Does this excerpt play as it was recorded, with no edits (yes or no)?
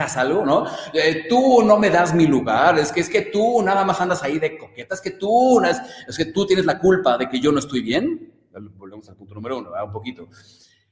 yes